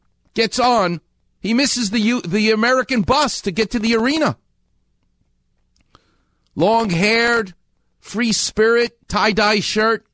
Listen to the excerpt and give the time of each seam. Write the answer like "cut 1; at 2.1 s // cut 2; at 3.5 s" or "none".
none